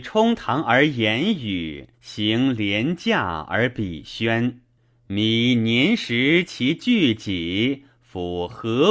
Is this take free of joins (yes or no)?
no